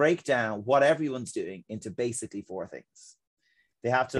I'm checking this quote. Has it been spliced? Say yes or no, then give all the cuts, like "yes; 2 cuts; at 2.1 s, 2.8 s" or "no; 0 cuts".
no; 0 cuts